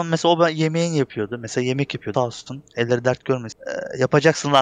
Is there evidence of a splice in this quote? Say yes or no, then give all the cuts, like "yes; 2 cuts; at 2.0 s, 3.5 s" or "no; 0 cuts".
yes; 1 cut; at 2.1 s